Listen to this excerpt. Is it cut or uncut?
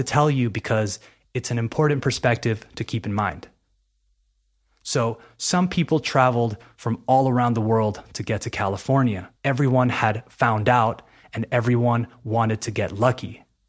cut